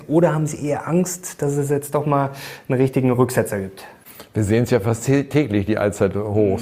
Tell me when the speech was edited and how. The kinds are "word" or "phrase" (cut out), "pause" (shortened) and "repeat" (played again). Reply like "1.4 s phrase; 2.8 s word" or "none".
none